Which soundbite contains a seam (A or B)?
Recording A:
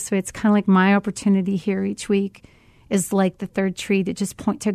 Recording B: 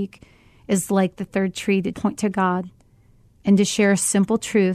B